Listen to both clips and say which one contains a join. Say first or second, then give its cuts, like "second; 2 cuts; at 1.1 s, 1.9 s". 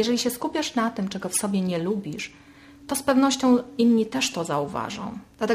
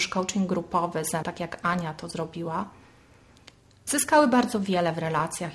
second; 1 cut; at 1.2 s